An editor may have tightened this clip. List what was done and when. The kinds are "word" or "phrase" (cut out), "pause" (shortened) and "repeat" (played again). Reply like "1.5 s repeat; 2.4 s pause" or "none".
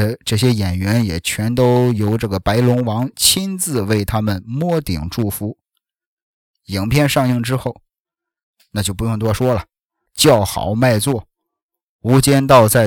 10.1 s word